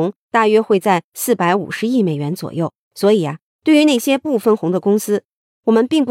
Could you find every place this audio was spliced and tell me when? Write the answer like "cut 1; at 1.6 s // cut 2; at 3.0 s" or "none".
cut 1; at 2.8 s